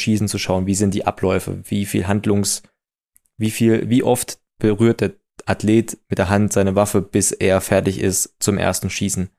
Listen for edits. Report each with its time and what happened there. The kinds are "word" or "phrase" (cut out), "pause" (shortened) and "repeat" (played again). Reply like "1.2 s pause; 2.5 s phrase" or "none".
none